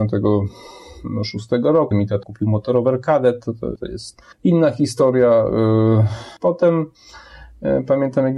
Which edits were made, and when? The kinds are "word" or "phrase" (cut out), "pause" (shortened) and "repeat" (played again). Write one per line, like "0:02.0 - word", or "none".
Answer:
0:01.9 - word
0:02.2 - word
0:03.8 - word
0:04.3 - pause
0:06.4 - pause